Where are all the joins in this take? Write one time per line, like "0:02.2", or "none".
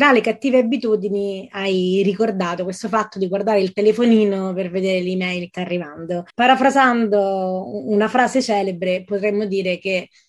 0:05.5
0:06.3